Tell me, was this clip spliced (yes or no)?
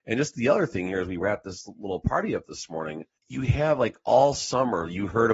yes